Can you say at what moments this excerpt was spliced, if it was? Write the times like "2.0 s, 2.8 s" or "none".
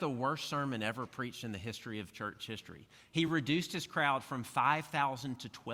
none